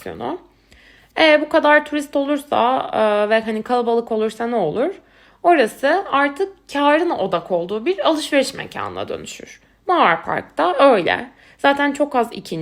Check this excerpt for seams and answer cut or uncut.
uncut